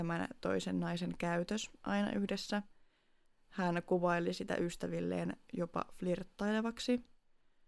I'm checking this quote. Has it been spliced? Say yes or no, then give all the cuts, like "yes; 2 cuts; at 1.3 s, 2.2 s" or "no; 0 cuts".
no; 0 cuts